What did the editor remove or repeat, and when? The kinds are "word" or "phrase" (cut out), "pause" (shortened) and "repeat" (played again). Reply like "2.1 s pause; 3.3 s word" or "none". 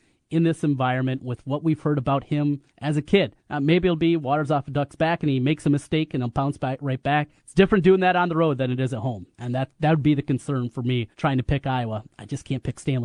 2.7 s pause; 3.4 s pause; 7.4 s pause; 9.3 s pause; 11.1 s pause